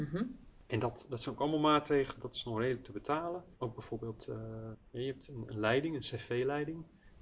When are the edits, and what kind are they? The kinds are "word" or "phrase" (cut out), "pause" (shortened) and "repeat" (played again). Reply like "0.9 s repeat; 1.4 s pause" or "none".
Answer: 3.5 s pause